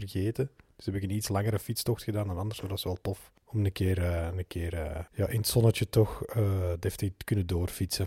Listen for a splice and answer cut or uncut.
cut